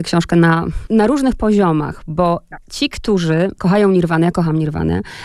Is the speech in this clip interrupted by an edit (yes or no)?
no